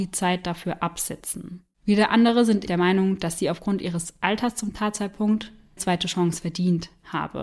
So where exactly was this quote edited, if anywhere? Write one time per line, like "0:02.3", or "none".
0:01.7
0:02.7
0:05.8